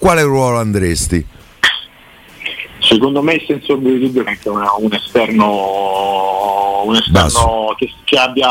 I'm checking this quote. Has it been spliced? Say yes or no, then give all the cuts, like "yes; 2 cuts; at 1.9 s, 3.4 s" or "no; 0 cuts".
yes; 1 cut; at 4.3 s